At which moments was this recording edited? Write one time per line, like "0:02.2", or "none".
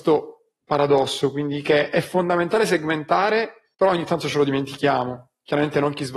0:03.7